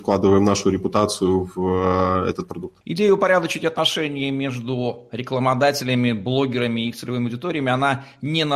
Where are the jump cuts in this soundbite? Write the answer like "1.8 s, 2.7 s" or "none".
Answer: 2.8 s